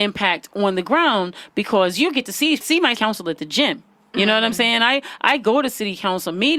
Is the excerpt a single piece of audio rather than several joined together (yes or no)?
no